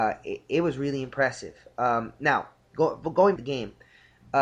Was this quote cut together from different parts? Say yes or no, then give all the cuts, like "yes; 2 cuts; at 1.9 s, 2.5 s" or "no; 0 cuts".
yes; 1 cut; at 3.4 s